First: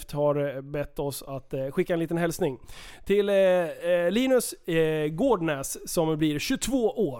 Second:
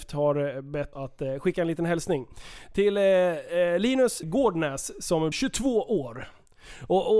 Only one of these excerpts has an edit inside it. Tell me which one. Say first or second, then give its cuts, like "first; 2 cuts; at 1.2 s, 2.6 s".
second; 3 cuts; at 0.9 s, 4.2 s, 5.3 s